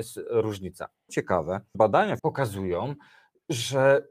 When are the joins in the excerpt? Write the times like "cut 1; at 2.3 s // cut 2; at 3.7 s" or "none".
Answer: cut 1; at 1.1 s // cut 2; at 1.7 s // cut 3; at 2.2 s